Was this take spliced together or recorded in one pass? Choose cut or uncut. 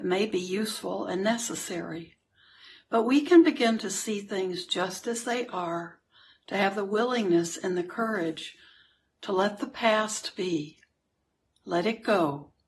uncut